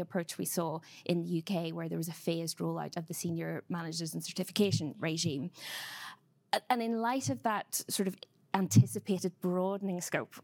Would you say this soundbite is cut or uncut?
uncut